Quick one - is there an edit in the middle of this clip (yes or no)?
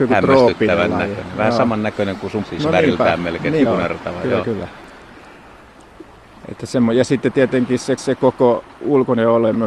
yes